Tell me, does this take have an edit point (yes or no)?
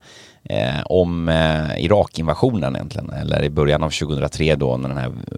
no